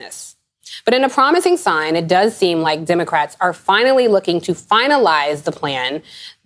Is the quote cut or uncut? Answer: uncut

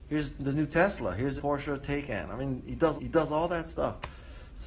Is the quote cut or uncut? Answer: cut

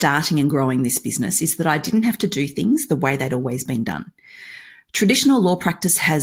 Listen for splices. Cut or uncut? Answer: uncut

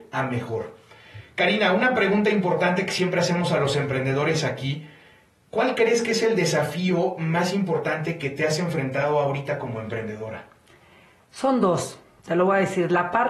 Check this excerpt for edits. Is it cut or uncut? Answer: uncut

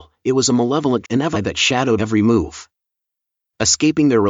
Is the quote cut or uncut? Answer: cut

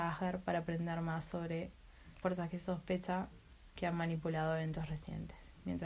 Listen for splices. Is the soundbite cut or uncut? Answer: cut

